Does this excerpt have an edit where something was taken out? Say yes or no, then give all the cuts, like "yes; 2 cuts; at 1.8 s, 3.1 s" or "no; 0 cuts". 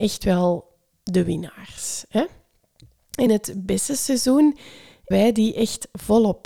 yes; 2 cuts; at 3.3 s, 5.1 s